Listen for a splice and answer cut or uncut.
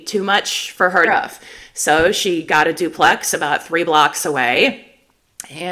cut